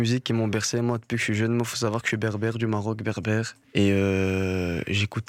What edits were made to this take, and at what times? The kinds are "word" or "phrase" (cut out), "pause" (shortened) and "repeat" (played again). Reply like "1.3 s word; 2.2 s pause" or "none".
3.6 s pause